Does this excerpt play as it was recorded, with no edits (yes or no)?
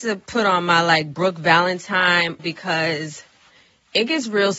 no